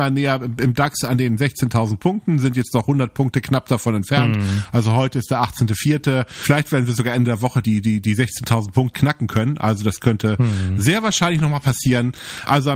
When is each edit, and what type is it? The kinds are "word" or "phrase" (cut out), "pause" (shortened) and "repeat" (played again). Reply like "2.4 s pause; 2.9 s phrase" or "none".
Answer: 7.6 s word; 8.9 s phrase